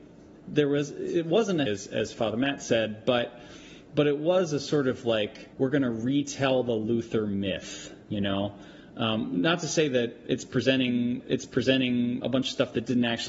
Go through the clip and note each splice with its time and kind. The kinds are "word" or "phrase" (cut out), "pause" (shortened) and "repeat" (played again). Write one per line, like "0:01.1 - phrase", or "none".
0:01.7 - word
0:05.5 - pause
0:08.0 - pause
0:11.2 - repeat